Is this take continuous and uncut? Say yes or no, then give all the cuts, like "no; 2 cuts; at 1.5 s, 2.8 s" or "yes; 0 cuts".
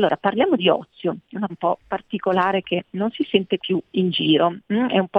no; 2 cuts; at 1.5 s, 3.6 s